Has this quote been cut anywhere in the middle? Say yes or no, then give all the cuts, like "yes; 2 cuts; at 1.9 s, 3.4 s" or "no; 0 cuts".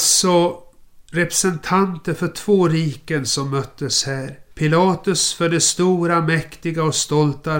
yes; 1 cut; at 4.5 s